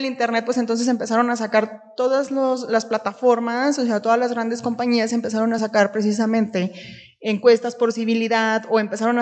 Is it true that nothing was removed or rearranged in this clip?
yes; 0 cuts

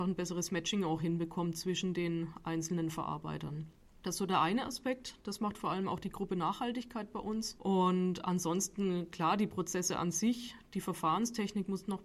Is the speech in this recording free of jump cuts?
yes; 0 cuts

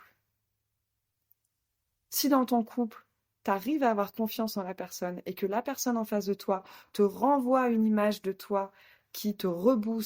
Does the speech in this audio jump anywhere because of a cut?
no; 0 cuts

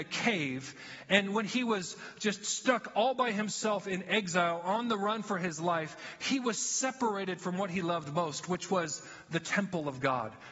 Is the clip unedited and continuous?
yes; 0 cuts

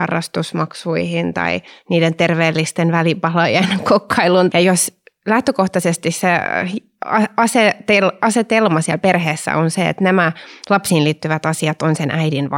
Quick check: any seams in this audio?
yes; 1 cut; at 1.7 s

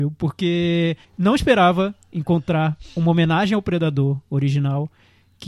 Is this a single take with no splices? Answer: no; 1 cut; at 1.0 s

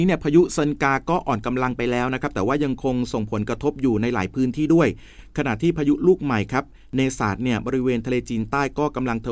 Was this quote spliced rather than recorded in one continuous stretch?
no; 0 cuts

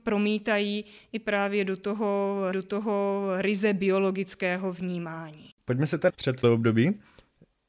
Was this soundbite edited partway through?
yes; 4 cuts; at 2.5 s, 5.5 s, 6.1 s, 6.4 s

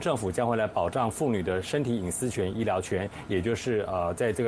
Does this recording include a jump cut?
no; 0 cuts

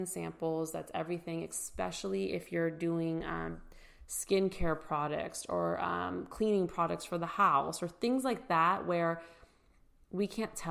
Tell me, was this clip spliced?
no; 0 cuts

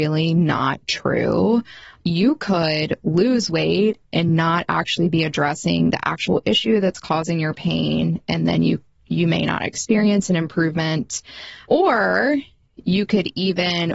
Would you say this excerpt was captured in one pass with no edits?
yes; 0 cuts

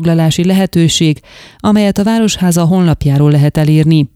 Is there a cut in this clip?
no; 0 cuts

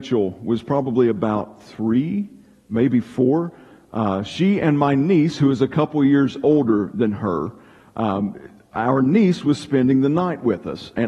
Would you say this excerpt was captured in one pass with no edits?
yes; 0 cuts

